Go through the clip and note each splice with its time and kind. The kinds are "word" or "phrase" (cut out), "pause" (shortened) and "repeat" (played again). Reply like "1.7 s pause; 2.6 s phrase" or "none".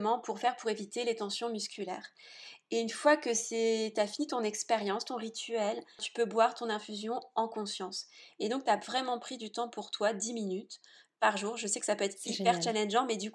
none